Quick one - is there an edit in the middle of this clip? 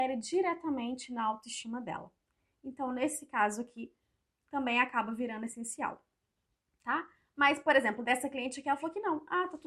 no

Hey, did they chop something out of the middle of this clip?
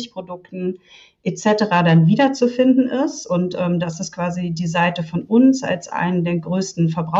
no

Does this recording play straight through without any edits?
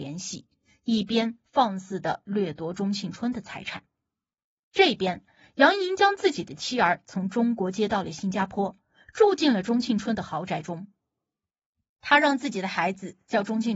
yes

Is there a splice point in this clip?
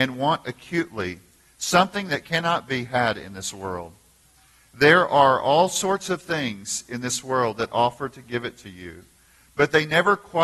no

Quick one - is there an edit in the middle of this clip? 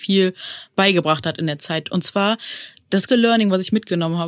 yes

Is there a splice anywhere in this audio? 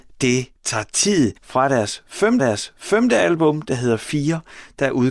yes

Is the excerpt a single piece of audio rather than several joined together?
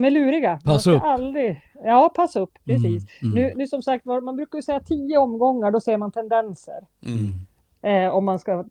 yes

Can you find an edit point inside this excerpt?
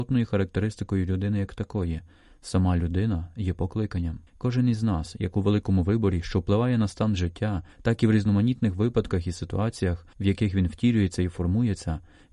yes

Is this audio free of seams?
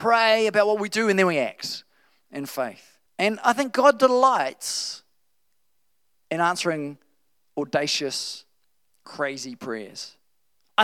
no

